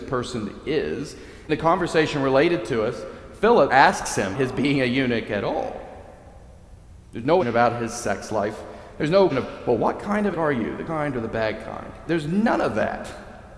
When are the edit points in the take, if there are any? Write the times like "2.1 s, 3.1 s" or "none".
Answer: 1.5 s, 3.7 s, 4.3 s, 7.4 s, 9.3 s, 10.3 s, 10.9 s